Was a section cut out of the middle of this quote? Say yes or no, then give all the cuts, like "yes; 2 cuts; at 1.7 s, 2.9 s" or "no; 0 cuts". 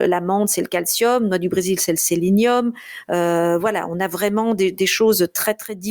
no; 0 cuts